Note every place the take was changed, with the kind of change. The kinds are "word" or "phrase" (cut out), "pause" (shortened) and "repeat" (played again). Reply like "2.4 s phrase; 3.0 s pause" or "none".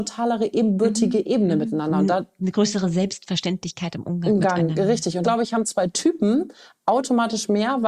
5.2 s word